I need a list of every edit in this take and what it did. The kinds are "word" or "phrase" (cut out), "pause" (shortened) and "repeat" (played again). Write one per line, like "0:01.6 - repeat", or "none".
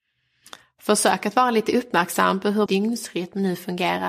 0:02.7 - word